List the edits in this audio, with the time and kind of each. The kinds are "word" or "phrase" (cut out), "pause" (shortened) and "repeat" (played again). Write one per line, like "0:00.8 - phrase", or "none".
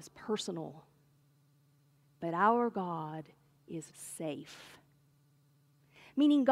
0:03.9 - word